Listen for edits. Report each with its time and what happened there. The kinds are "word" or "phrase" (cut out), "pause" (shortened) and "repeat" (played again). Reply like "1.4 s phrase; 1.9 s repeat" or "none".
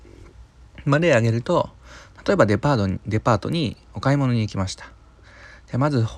3.8 s pause